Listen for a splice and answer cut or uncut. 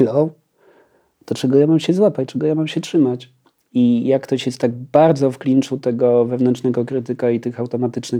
cut